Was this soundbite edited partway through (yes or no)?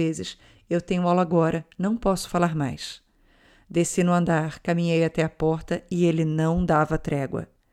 no